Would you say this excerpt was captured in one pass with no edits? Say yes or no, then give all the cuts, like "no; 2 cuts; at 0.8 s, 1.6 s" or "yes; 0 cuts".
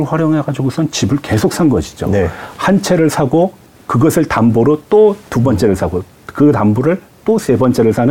yes; 0 cuts